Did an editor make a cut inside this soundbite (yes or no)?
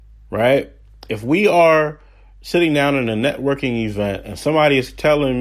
no